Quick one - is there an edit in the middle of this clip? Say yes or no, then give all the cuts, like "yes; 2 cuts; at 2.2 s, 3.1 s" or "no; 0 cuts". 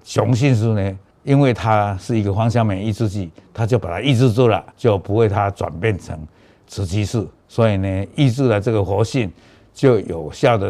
yes; 3 cuts; at 1.1 s, 4.7 s, 7.4 s